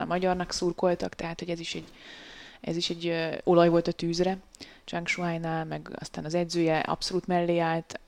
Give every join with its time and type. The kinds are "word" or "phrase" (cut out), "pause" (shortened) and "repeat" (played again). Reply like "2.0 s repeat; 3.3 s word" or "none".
none